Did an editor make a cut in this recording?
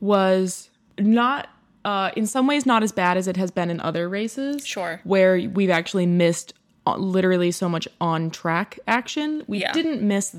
no; 0 cuts

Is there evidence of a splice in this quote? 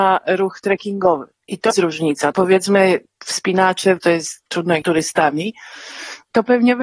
yes; 6 cuts; at 1.4 s, 1.7 s, 2.3 s, 4.0 s, 4.4 s, 4.8 s

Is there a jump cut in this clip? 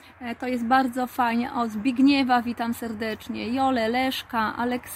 no; 0 cuts

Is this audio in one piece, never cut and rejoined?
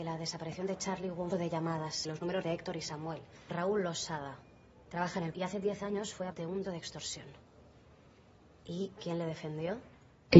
no; 8 cuts; at 1.3 s, 2.1 s, 2.4 s, 3.5 s, 5.3 s, 6.3 s, 6.6 s, 9.0 s

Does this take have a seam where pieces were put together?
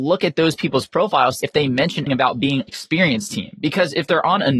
yes; 3 cuts; at 1.4 s, 2.1 s, 2.7 s

